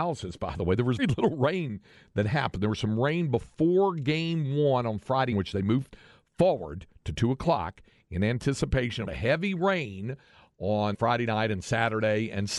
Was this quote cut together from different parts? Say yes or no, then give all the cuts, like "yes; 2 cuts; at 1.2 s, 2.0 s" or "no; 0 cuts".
yes; 4 cuts; at 1.0 s, 5.3 s, 9.1 s, 10.9 s